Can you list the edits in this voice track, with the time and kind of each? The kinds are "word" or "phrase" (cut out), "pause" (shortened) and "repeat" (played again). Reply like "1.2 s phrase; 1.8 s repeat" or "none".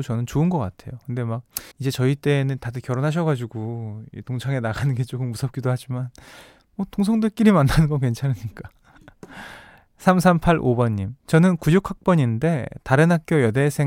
1.7 s pause; 11.2 s pause